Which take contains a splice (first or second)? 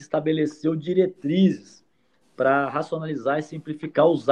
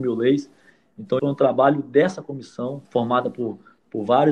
second